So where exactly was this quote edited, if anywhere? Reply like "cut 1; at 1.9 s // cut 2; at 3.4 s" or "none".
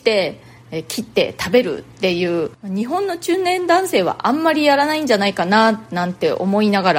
cut 1; at 2.6 s